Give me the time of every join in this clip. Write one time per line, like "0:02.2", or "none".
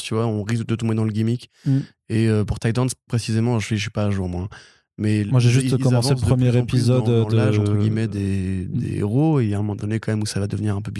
none